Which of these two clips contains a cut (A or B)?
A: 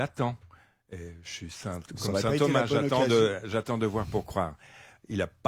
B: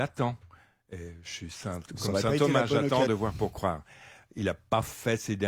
B